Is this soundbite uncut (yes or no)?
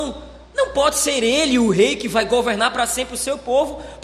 yes